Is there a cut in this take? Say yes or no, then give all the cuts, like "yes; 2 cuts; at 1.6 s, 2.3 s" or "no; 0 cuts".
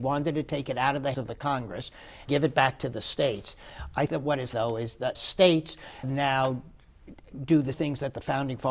yes; 7 cuts; at 1.1 s, 2.3 s, 4.1 s, 4.5 s, 5.1 s, 6.0 s, 7.7 s